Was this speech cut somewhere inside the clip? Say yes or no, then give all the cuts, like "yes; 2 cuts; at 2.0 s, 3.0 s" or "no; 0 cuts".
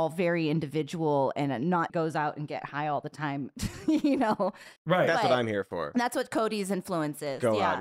yes; 2 cuts; at 1.9 s, 4.8 s